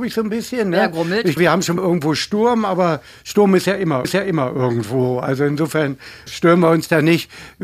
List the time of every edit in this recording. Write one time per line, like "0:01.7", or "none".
0:01.4
0:01.8
0:04.0
0:06.3